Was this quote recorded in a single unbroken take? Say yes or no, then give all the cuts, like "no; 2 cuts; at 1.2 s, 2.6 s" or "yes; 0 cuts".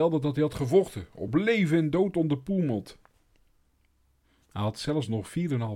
yes; 0 cuts